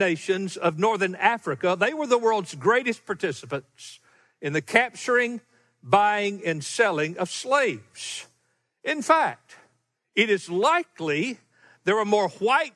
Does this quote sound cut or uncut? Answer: uncut